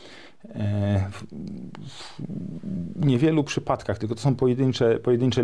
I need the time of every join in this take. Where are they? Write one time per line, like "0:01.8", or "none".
none